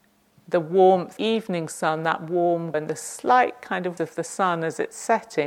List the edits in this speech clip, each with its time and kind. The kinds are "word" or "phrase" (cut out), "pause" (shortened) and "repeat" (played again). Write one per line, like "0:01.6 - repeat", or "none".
0:01.2 - phrase
0:02.7 - word
0:04.0 - word